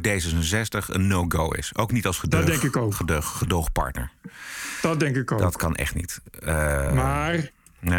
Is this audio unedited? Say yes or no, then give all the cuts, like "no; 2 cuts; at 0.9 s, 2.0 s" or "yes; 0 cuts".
yes; 0 cuts